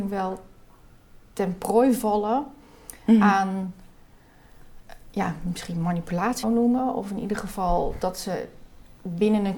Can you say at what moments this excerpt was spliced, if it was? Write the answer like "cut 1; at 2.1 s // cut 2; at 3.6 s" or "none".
cut 1; at 6.4 s